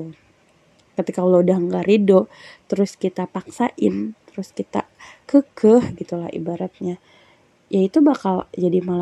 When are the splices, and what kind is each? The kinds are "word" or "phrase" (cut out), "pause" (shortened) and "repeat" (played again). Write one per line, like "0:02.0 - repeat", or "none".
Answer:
none